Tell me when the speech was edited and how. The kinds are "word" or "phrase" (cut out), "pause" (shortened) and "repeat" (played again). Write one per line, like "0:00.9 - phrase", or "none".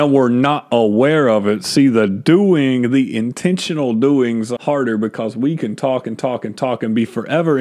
0:04.6 - word